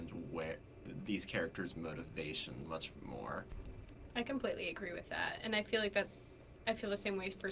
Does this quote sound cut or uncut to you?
cut